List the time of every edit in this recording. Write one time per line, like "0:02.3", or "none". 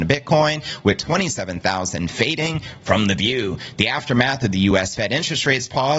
none